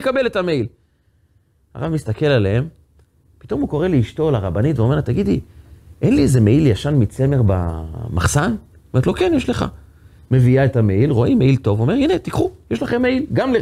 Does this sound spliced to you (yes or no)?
no